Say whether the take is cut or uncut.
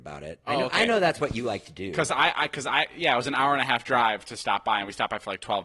uncut